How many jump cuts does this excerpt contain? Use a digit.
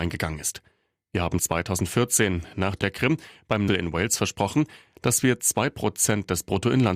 3